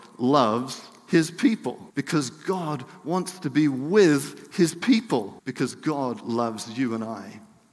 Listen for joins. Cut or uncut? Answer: cut